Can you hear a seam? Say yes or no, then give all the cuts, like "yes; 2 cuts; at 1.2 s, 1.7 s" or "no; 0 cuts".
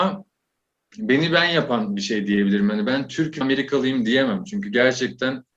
yes; 1 cut; at 3.4 s